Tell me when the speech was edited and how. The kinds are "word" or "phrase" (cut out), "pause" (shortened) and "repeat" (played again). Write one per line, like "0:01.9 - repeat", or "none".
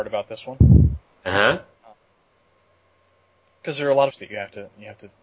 0:04.1 - phrase